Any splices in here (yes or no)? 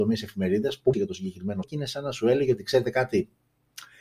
yes